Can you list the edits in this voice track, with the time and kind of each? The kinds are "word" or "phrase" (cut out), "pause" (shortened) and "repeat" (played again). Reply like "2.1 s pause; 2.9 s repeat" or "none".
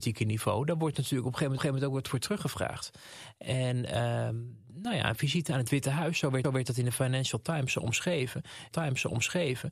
1.6 s repeat; 6.4 s repeat; 8.7 s repeat